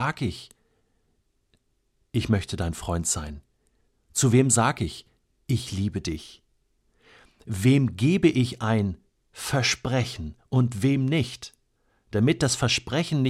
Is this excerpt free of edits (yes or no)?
yes